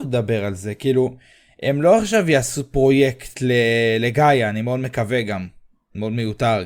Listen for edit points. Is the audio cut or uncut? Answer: uncut